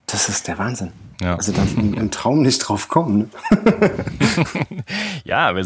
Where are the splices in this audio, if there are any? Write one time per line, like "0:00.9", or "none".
0:01.1
0:01.7